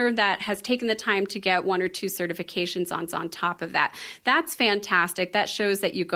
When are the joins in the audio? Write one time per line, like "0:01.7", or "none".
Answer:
0:03.1